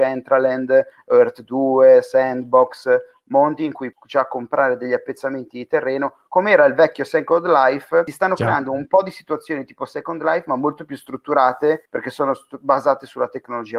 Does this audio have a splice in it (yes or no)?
yes